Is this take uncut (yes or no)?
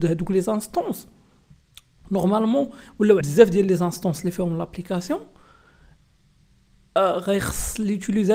no